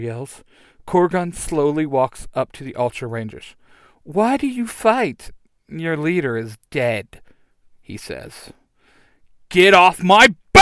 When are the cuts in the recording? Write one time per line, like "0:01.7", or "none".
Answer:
none